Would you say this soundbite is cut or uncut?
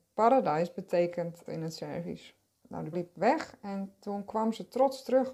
cut